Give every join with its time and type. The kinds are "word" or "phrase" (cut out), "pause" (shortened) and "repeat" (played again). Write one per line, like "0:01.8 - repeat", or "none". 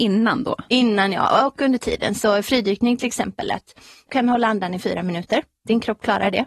0:04.1 - phrase